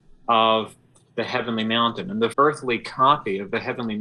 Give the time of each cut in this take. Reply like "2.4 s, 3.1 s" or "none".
2.3 s

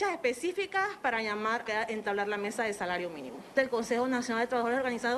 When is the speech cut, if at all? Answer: 1.6 s

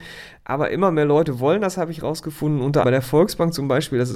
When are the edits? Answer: 2.8 s

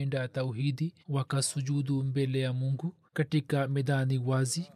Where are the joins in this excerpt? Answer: 1.0 s, 3.1 s

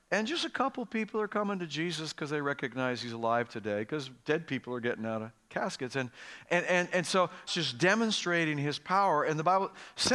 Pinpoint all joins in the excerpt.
7.5 s

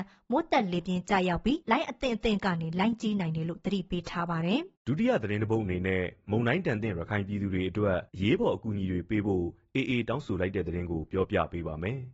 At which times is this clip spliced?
1.6 s, 4.8 s, 8.1 s

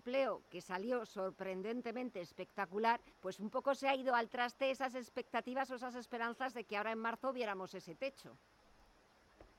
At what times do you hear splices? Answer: 3.1 s

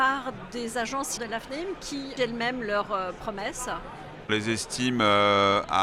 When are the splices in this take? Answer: 1.2 s, 2.2 s, 4.3 s

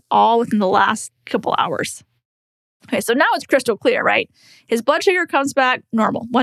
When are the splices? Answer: none

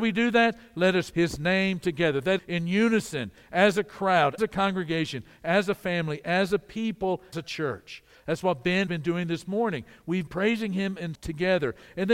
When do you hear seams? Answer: 1.1 s, 2.4 s, 4.4 s, 7.3 s, 8.9 s, 10.3 s, 11.1 s

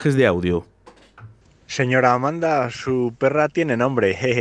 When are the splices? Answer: 1.4 s

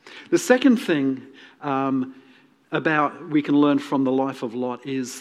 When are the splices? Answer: none

